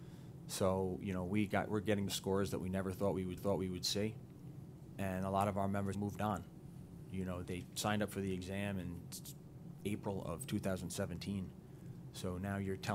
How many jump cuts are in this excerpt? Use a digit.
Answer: 4